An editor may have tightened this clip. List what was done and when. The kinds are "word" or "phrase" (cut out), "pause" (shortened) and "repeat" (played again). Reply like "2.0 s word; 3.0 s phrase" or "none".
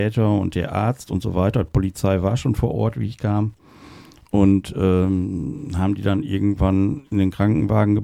none